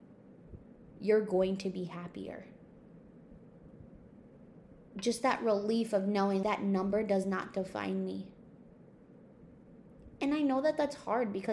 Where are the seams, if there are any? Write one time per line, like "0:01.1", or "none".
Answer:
0:06.4